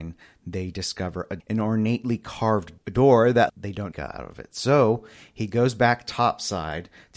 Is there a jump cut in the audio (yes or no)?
yes